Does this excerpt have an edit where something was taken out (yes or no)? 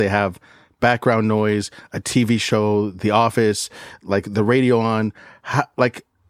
no